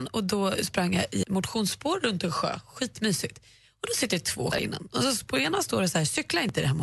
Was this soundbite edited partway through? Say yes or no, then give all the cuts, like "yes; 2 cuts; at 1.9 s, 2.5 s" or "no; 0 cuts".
yes; 2 cuts; at 1.2 s, 4.5 s